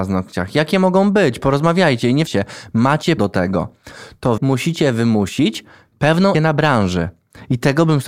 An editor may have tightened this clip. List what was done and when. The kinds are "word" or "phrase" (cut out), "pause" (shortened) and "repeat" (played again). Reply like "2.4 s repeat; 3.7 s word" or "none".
2.3 s word; 3.2 s word; 4.4 s word; 6.3 s word